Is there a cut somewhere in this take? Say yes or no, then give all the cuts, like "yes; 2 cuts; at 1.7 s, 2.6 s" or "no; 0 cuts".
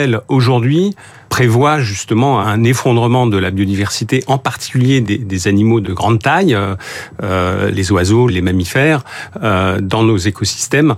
yes; 6 cuts; at 1.3 s, 2.4 s, 5.0 s, 5.8 s, 7.7 s, 8.3 s